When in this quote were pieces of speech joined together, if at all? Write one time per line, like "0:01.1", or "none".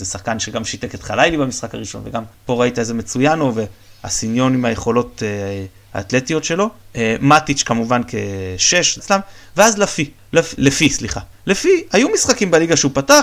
0:09.0
0:10.6